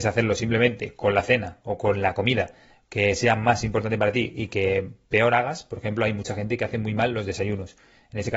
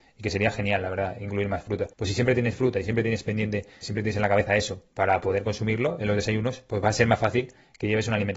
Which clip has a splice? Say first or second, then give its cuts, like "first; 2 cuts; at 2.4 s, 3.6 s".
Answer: second; 2 cuts; at 1.9 s, 3.8 s